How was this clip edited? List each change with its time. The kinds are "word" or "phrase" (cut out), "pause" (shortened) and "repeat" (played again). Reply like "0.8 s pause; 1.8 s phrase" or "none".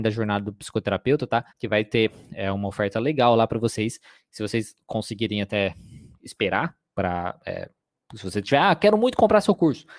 1.5 s pause